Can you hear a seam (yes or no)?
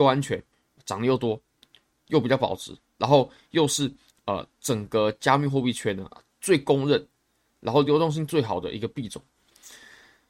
no